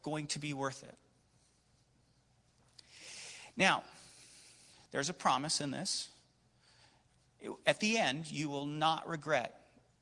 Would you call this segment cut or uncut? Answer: cut